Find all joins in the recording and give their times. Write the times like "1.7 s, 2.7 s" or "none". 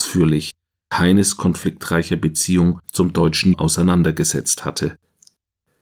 0.9 s, 2.8 s, 3.5 s